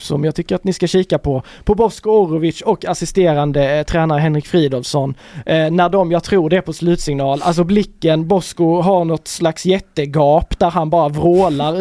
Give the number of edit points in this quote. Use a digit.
0